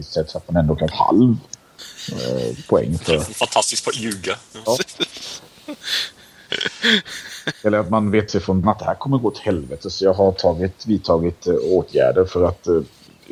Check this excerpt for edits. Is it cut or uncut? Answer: cut